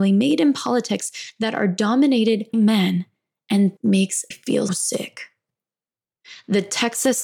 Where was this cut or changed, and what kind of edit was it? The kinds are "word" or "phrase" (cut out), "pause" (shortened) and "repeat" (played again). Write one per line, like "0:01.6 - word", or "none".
0:02.5 - word
0:03.8 - word
0:04.3 - word
0:04.7 - word